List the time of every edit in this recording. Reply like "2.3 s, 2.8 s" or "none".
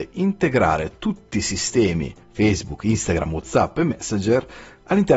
none